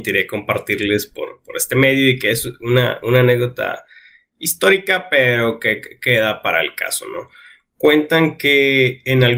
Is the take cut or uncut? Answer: uncut